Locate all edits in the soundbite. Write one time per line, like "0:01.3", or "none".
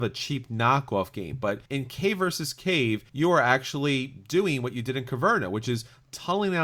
0:01.7
0:03.1